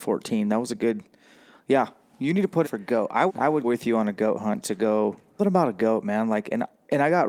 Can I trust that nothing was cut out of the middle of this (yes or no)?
no